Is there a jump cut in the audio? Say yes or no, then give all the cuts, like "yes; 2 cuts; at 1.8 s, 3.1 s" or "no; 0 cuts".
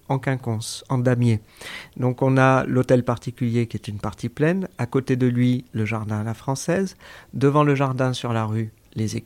no; 0 cuts